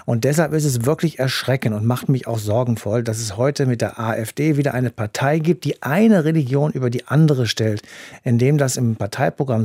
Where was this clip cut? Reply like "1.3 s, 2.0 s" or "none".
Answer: none